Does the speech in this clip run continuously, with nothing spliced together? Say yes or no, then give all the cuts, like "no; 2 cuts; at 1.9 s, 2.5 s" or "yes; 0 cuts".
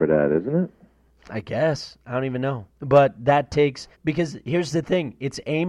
no; 2 cuts; at 2.7 s, 3.9 s